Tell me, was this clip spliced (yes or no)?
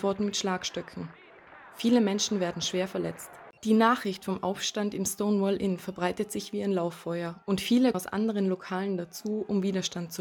yes